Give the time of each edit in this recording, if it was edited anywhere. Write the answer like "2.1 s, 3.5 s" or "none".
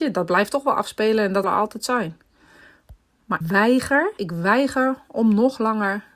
1.4 s, 3.4 s, 4.2 s